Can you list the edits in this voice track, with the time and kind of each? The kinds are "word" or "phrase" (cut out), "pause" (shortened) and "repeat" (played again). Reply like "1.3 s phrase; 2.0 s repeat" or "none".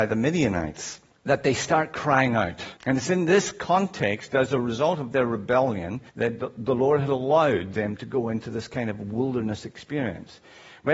1.1 s pause; 2.8 s pause; 6.1 s pause